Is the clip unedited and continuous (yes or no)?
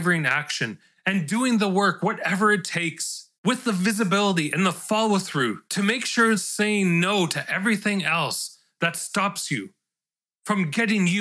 no